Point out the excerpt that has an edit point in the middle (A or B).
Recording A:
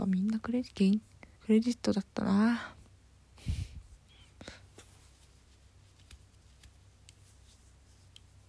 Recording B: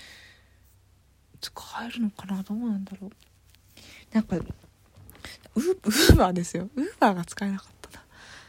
A